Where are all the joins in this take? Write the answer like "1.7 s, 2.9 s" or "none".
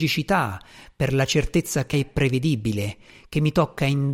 1.9 s